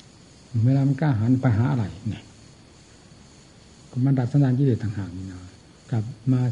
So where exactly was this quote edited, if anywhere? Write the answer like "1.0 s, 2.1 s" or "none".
5.6 s